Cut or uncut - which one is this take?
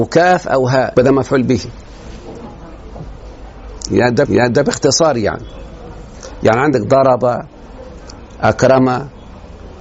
cut